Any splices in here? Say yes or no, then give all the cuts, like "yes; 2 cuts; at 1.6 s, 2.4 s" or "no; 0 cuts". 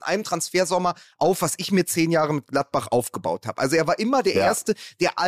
no; 0 cuts